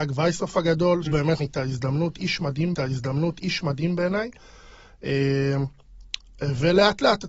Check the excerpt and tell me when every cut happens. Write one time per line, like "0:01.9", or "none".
0:01.1
0:01.4
0:02.7